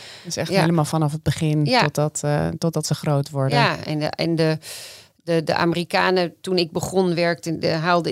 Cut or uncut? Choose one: uncut